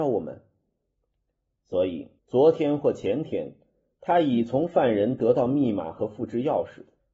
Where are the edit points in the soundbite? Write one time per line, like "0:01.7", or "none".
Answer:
0:02.2